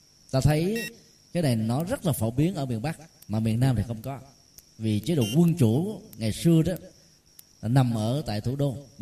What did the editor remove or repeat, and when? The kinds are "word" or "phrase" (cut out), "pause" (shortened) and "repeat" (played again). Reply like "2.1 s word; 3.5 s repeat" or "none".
none